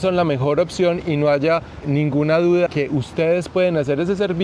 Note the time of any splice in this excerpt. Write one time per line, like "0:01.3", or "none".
0:01.8
0:02.7